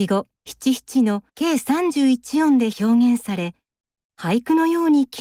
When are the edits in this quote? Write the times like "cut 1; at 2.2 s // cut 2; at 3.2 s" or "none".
cut 1; at 1.3 s